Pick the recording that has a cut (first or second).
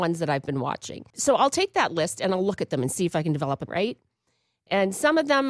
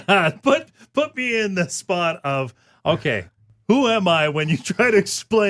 first